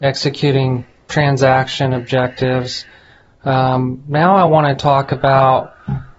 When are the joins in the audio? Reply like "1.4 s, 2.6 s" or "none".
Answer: none